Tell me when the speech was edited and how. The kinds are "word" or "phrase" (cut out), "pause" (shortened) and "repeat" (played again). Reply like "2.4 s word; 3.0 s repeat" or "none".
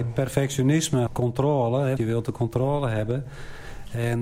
1.1 s word; 2.0 s word

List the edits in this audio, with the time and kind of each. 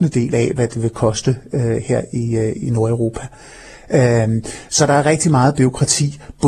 none

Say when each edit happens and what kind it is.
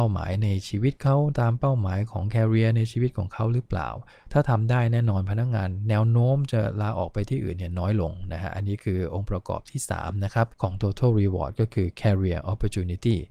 10.5 s pause

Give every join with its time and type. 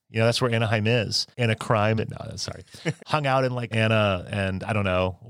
1.3 s pause; 2.0 s phrase; 3.0 s word; 3.7 s word

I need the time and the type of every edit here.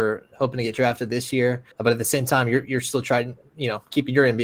1.7 s pause

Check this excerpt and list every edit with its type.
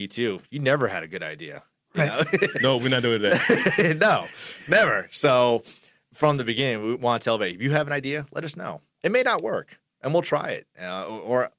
none

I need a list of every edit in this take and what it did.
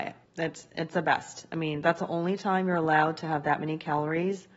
none

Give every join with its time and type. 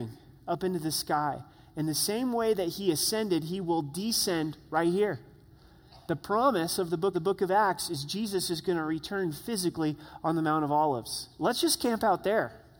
7.1 s repeat

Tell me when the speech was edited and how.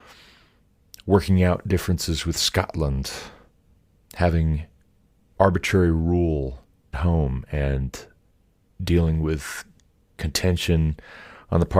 6.9 s word

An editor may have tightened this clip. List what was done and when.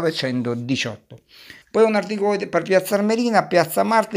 1.6 s pause

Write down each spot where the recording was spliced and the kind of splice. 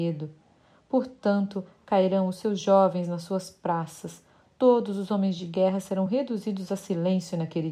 none

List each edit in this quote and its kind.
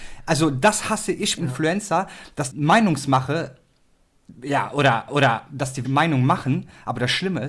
1.4 s phrase; 2.5 s word; 4.3 s pause; 5.1 s repeat; 5.8 s word

